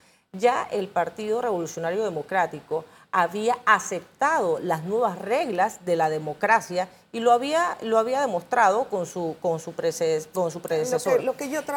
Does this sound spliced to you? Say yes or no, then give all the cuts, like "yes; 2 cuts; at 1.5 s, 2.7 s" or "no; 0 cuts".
no; 0 cuts